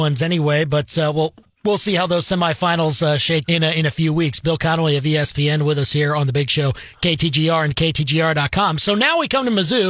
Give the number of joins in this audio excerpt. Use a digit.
2